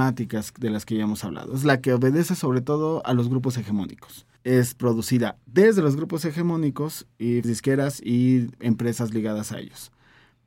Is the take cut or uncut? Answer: cut